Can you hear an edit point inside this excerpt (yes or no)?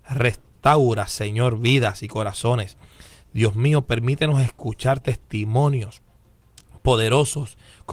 no